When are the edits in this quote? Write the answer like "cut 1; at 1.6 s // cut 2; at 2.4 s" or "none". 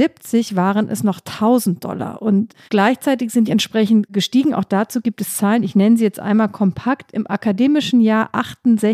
cut 1; at 2.7 s // cut 2; at 3.5 s